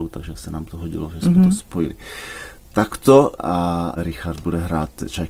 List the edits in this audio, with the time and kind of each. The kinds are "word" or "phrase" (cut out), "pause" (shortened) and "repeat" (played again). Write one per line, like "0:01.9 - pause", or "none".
none